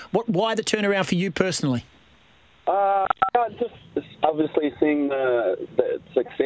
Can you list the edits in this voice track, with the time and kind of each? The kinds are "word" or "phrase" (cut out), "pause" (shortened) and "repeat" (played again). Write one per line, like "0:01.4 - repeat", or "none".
none